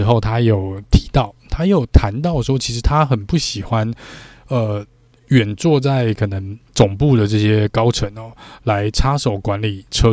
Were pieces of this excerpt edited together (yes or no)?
yes